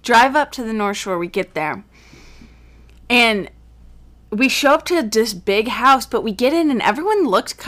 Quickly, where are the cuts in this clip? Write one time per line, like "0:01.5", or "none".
none